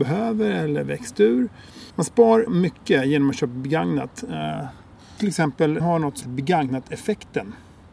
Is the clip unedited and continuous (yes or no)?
no